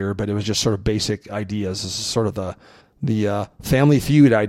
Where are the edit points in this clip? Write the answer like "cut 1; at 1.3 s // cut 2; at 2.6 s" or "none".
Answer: cut 1; at 2.8 s